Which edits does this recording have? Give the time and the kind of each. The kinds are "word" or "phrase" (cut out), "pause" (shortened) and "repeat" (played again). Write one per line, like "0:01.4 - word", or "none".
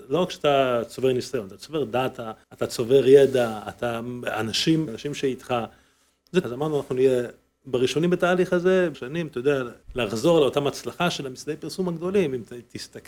0:02.4 - pause
0:04.9 - phrase
0:06.4 - word
0:08.9 - phrase
0:09.8 - pause